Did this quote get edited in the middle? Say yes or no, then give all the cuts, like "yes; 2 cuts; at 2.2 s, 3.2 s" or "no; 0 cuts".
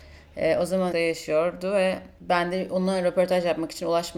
yes; 1 cut; at 0.9 s